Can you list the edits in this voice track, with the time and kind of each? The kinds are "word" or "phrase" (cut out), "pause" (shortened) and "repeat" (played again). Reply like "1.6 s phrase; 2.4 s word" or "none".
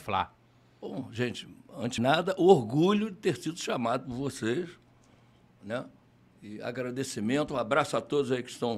2.0 s word